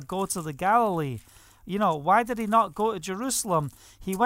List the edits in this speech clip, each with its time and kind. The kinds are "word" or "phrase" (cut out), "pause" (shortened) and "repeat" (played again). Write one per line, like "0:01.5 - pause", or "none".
none